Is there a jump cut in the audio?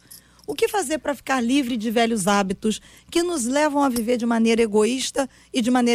no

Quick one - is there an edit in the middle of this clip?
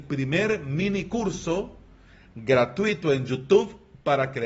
no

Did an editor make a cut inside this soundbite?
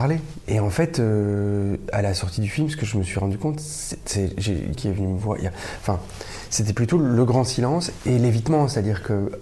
yes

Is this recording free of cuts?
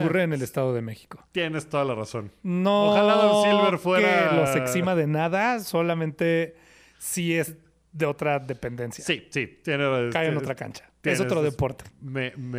yes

